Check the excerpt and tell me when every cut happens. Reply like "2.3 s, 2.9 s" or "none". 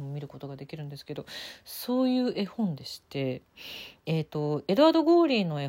4.0 s

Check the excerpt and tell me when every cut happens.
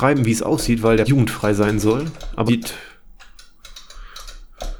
1.0 s, 2.5 s

